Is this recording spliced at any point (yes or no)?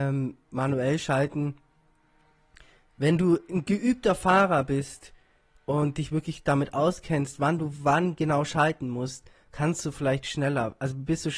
no